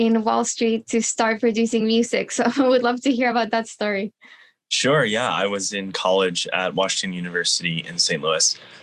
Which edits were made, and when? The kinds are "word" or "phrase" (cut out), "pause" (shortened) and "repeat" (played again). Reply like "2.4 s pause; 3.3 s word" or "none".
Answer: none